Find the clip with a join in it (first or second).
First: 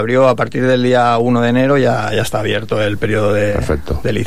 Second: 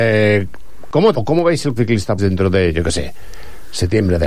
second